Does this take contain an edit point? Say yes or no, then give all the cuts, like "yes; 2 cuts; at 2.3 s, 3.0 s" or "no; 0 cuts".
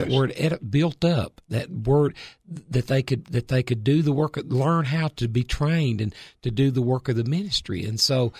no; 0 cuts